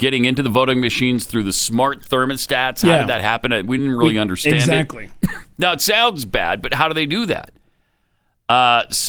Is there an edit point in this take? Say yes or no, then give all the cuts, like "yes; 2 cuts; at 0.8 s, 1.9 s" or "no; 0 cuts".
no; 0 cuts